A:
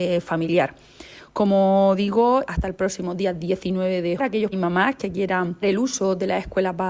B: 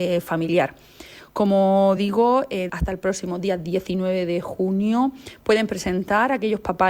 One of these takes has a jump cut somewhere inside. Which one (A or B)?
A